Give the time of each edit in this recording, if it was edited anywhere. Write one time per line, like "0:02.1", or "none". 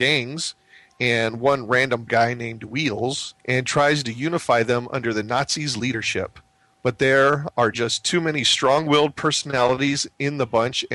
0:02.1
0:03.4